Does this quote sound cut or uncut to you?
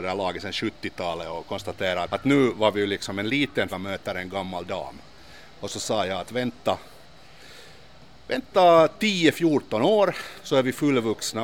cut